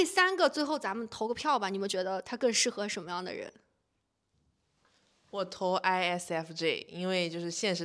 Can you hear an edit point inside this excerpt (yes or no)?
no